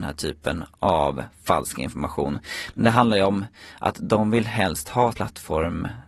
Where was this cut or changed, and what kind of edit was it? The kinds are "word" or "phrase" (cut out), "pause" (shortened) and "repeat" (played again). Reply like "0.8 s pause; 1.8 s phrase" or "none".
5.1 s word